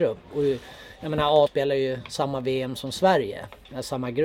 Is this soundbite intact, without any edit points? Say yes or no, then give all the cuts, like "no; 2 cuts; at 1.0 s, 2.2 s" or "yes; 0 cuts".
no; 1 cut; at 1.5 s